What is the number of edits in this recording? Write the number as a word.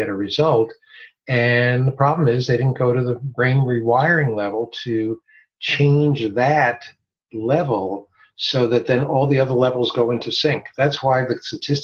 zero